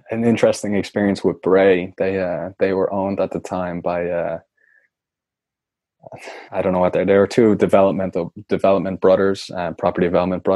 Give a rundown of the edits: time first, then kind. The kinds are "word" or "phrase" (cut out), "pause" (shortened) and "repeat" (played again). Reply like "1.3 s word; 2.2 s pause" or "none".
6.5 s pause